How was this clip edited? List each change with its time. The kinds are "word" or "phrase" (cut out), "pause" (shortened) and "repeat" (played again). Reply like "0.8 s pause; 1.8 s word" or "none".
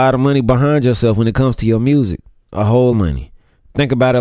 2.9 s word